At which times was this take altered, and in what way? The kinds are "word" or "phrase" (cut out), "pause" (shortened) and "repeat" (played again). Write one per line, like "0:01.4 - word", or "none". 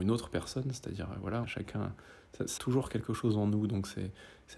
0:01.4 - word
0:02.6 - word

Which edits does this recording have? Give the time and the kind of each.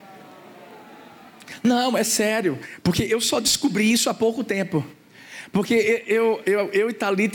none

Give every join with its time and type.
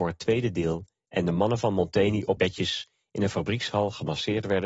0:02.4 - word

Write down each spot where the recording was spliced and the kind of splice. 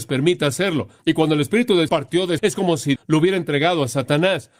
0:01.0 - pause
0:01.9 - word
0:02.4 - word
0:03.0 - word

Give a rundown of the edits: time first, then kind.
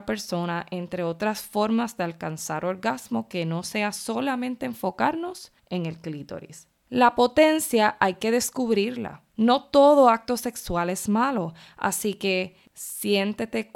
0:05.6 - pause
0:06.8 - pause
0:09.3 - pause
0:12.6 - pause

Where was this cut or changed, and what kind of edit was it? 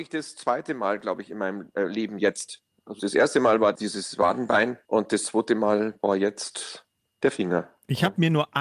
0:03.0 - word
0:04.8 - pause

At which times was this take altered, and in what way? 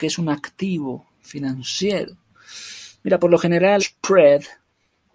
0:03.8 - word

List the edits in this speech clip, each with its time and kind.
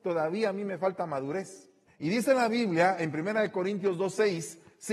0:01.9 - pause

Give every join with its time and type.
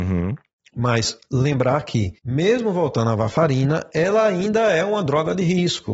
0:02.2 - pause

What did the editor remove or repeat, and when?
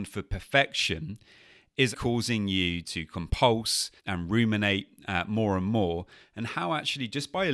0:01.9 - word
0:02.8 - word
0:04.0 - pause

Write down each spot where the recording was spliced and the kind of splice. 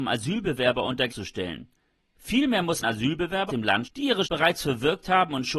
0:01.1 - word
0:02.8 - word
0:03.5 - word
0:03.8 - word
0:04.2 - word

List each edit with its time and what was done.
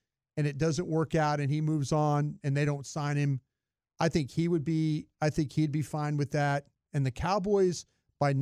none

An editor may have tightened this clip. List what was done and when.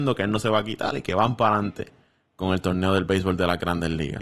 none

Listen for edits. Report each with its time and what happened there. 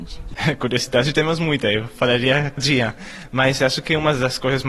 0:02.6 - phrase

